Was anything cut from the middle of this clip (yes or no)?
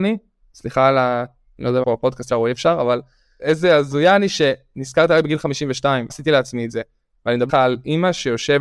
yes